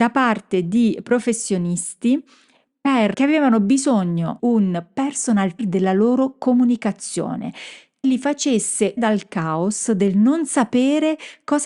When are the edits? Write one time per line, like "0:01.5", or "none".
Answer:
0:03.1
0:04.4
0:05.6
0:08.0
0:09.0